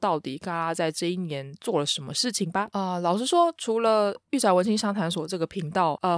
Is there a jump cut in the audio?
no; 0 cuts

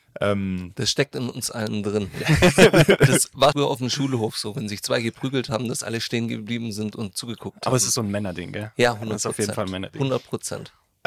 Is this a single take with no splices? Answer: no; 1 cut; at 3.5 s

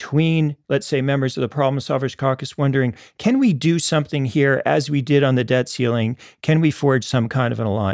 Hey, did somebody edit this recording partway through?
no; 0 cuts

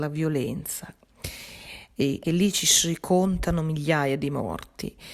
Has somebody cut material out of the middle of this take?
yes; 1 cut; at 2.2 s

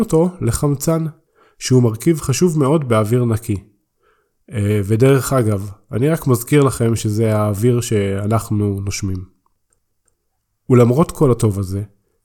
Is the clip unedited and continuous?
yes; 0 cuts

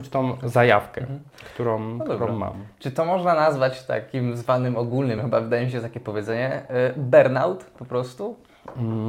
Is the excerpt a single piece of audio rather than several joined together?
yes; 0 cuts

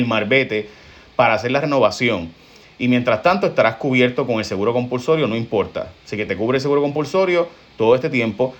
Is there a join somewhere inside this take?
no; 0 cuts

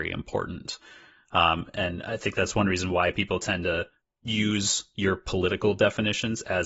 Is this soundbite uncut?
no; 1 cut; at 4.0 s

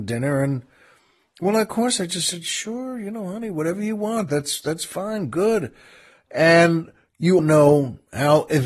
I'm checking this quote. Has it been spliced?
yes; 1 cut; at 7.4 s

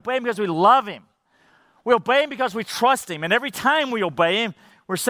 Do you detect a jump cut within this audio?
no; 0 cuts

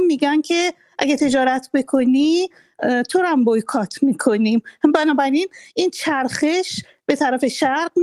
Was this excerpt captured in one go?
yes; 0 cuts

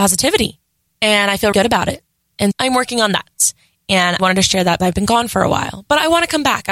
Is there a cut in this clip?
yes; 4 cuts; at 1.5 s, 2.5 s, 4.2 s, 4.8 s

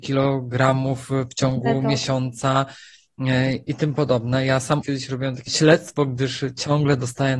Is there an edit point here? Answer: yes; 3 cuts; at 3.7 s, 4.8 s, 5.5 s

